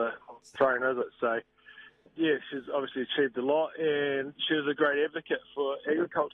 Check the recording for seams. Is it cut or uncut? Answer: cut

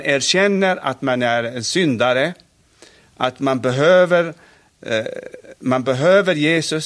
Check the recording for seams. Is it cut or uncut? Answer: uncut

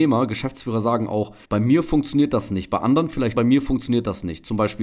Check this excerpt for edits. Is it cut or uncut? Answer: cut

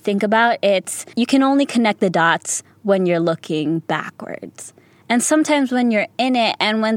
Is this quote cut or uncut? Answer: uncut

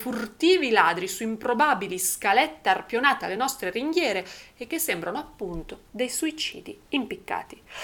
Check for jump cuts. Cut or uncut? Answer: uncut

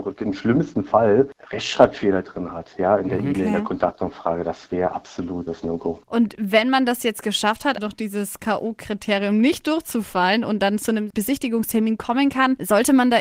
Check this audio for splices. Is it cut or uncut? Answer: cut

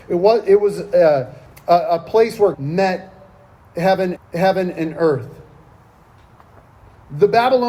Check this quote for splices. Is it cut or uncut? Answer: cut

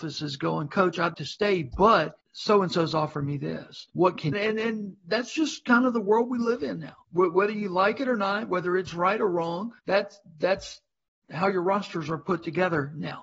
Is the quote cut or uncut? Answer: cut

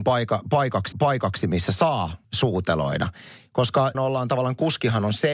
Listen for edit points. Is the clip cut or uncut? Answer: cut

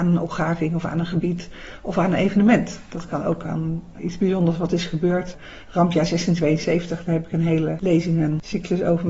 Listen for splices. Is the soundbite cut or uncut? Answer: uncut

